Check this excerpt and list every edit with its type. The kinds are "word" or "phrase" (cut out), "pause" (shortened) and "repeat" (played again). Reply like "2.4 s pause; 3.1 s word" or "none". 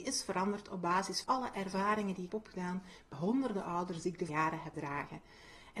1.2 s word; 2.3 s word; 3.1 s word; 4.3 s word; 4.7 s word

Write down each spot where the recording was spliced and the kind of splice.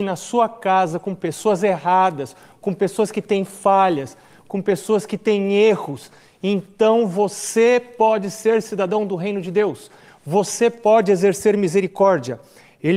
none

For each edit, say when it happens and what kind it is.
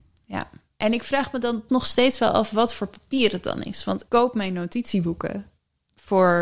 1.7 s word; 4.1 s word

